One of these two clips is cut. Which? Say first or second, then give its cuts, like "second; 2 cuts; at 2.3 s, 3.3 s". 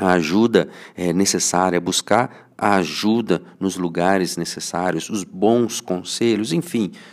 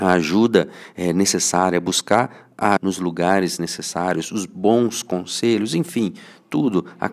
second; 1 cut; at 2.8 s